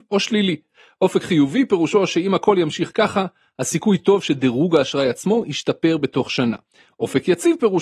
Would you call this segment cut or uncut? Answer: uncut